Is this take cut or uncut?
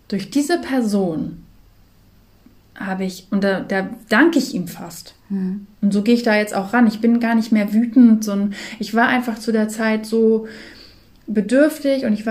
uncut